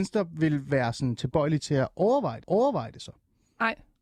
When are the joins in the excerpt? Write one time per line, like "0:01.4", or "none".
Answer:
0:02.4

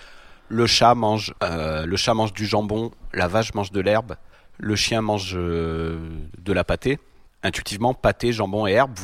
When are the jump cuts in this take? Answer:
0:01.4
0:04.3
0:07.3

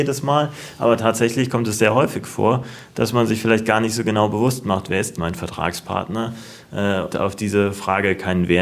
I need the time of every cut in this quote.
0:05.2
0:07.1

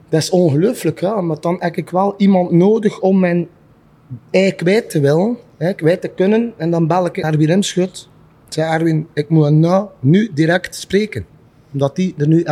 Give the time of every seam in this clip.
0:04.2
0:07.2

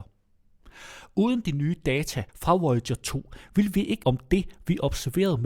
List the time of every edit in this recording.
0:02.3
0:04.0

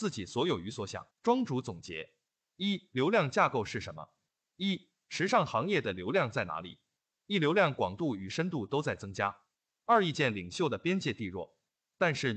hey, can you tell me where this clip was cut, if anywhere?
0:01.1

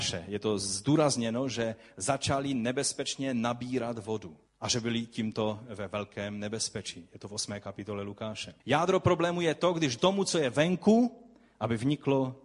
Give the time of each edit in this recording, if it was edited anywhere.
0:04.5
0:08.6
0:10.0

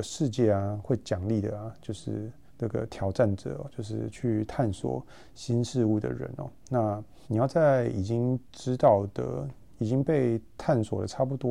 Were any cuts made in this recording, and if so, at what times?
0:02.5
0:07.2
0:08.4

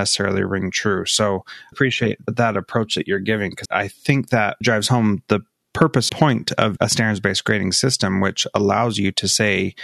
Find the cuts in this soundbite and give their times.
0:01.7
0:03.7
0:04.6
0:06.1
0:06.8

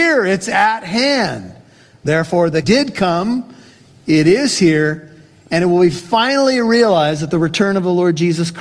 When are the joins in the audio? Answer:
0:02.6

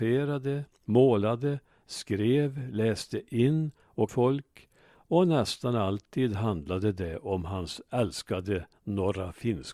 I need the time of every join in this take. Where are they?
0:04.1

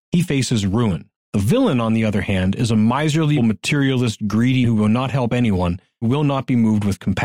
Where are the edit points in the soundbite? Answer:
0:03.4
0:04.6
0:06.0

